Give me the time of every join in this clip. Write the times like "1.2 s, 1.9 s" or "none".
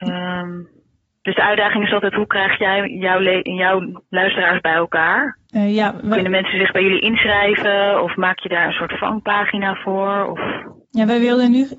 5.5 s